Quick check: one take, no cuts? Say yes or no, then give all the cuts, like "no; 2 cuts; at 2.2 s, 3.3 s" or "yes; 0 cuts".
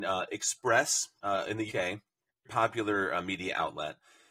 no; 3 cuts; at 1.2 s, 1.7 s, 2.4 s